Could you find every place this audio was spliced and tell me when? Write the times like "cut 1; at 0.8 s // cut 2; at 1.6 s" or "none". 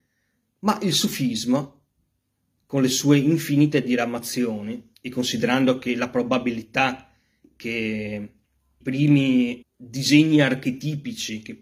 cut 1; at 4.9 s // cut 2; at 8.8 s // cut 3; at 9.6 s